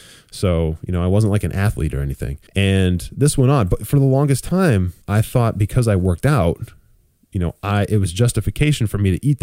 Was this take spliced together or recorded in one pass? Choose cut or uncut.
cut